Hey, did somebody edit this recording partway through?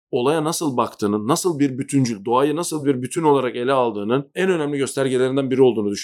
no; 0 cuts

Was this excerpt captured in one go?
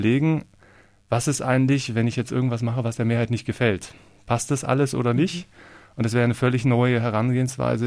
yes; 0 cuts

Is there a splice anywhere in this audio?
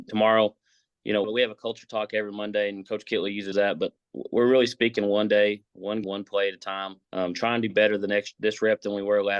yes; 6 cuts; at 1.2 s, 3.5 s, 4.0 s, 6.0 s, 7.0 s, 7.7 s

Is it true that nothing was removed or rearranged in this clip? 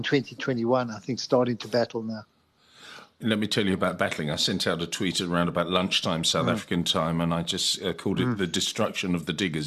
yes; 0 cuts

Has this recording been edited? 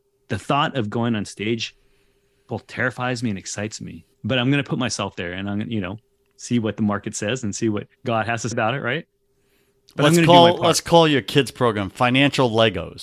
yes; 4 cuts; at 4.1 s, 5.1 s, 7.9 s, 8.5 s

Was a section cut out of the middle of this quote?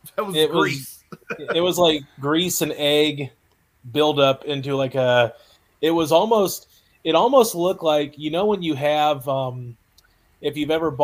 no; 0 cuts

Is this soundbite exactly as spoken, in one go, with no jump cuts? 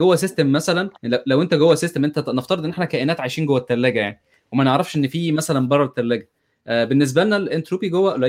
no; 1 cut; at 1.0 s

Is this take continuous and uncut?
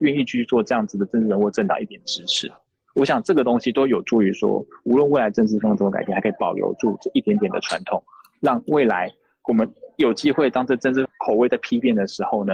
yes; 0 cuts

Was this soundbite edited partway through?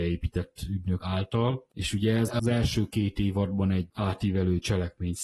yes; 1 cut; at 1.7 s

